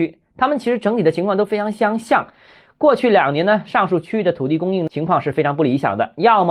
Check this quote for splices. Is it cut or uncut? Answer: uncut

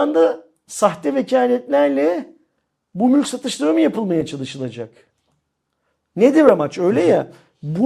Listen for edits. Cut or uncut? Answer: uncut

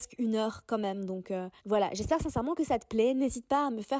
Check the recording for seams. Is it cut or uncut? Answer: cut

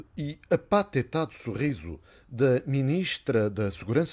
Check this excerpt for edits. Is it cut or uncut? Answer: uncut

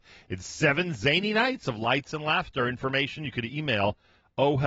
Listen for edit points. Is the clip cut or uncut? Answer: uncut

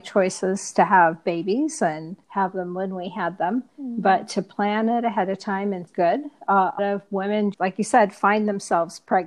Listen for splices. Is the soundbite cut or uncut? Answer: cut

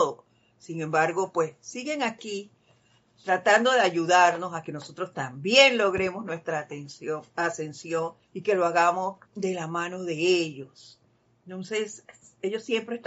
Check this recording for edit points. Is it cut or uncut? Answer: cut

